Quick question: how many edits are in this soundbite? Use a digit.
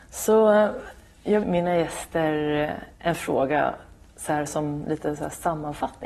1